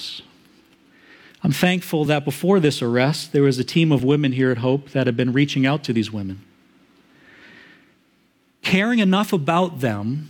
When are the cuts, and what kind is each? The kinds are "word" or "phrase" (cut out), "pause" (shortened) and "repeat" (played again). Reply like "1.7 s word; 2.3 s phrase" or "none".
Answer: none